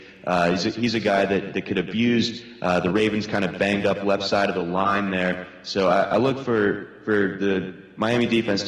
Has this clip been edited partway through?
no; 0 cuts

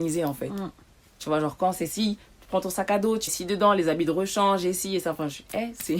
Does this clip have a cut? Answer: yes; 1 cut; at 3.3 s

